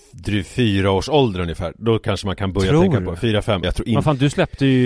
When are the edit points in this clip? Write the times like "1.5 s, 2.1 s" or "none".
3.6 s